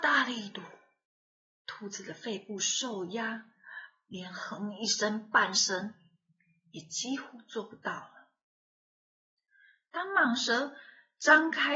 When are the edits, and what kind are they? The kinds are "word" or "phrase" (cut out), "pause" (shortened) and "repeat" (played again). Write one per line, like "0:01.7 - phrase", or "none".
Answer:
none